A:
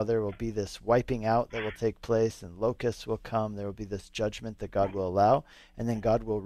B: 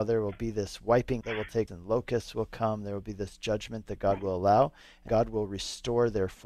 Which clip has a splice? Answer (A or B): B